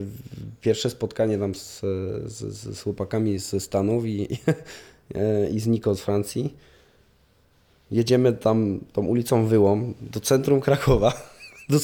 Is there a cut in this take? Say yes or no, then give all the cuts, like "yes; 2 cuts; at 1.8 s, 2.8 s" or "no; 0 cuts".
no; 0 cuts